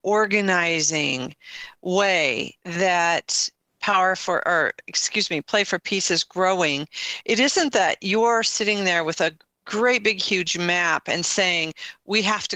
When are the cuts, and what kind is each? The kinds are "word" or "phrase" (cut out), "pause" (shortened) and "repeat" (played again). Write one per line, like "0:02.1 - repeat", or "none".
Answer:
0:03.6 - pause